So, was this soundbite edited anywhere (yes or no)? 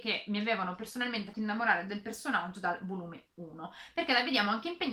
yes